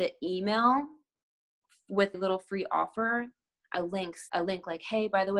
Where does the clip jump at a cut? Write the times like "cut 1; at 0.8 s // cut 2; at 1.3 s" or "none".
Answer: cut 1; at 2.1 s // cut 2; at 3.7 s // cut 3; at 4.3 s